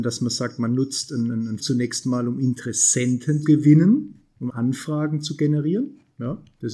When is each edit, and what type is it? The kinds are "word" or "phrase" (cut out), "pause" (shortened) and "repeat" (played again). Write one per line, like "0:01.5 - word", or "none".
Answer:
0:01.6 - word
0:03.4 - word
0:04.5 - word